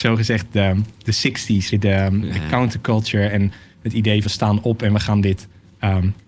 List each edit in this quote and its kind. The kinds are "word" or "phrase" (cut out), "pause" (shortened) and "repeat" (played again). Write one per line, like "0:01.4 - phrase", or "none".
0:01.7 - word
0:04.2 - word

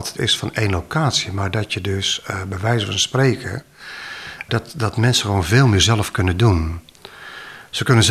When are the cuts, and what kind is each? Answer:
0:04.5 - word

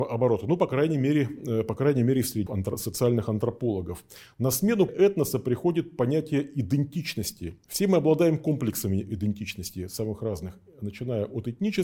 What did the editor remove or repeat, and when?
0:02.5 - word
0:04.9 - word

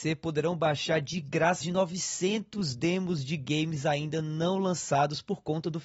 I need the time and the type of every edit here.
0:01.6 - word

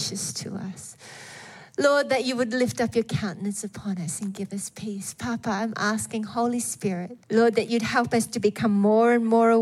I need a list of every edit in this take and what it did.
0:07.2 - pause

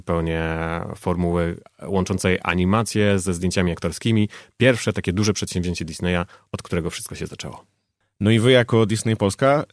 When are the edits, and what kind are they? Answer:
none

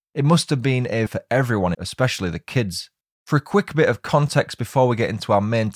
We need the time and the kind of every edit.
0:01.1 - phrase
0:01.7 - word
0:03.0 - pause

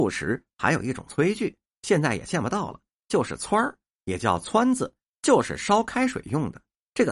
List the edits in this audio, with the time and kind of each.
none

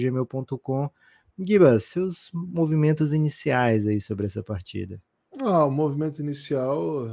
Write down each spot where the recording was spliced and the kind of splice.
none

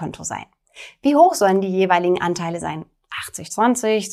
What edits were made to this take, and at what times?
none

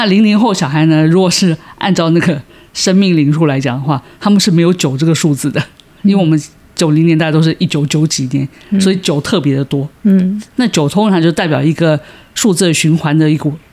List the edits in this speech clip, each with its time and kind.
none

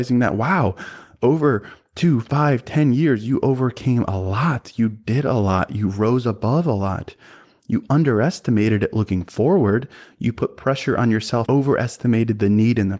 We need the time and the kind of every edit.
0:11.5 - word

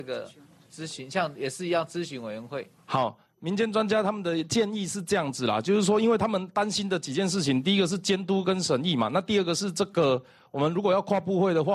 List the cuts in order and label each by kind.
none

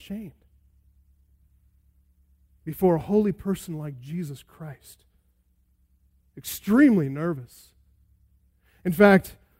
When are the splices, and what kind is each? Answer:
none

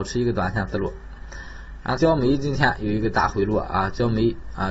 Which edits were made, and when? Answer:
0:02.0 - phrase

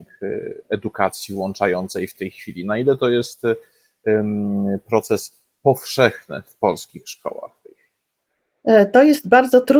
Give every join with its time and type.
none

